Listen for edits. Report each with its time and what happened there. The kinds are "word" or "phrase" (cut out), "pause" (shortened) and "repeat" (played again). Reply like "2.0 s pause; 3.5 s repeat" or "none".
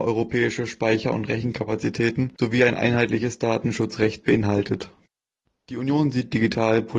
none